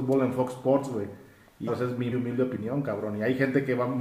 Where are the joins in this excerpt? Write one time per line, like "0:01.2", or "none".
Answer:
0:01.7
0:02.1